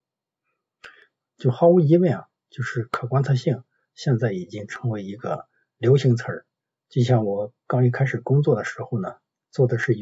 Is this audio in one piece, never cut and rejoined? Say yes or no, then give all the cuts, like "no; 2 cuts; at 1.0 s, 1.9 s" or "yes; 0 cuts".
yes; 0 cuts